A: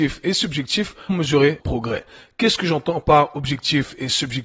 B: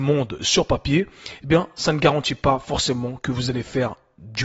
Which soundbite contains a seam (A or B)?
A